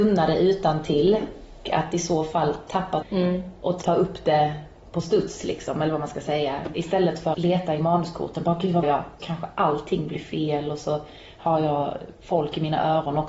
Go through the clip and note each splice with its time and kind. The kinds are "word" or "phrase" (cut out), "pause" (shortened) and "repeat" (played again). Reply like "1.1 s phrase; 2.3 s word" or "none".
1.6 s word; 3.0 s word; 3.8 s word; 7.3 s word; 8.8 s word; 9.2 s word